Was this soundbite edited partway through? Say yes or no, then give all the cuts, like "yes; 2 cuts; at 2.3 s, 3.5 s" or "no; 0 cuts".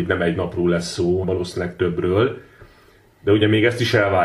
yes; 1 cut; at 1.2 s